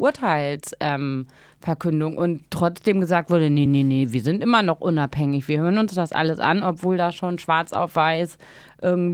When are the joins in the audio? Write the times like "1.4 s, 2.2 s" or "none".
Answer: none